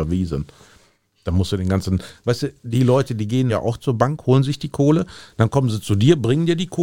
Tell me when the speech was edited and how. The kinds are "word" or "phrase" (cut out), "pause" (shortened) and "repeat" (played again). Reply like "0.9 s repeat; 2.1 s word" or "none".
2.6 s word; 3.5 s word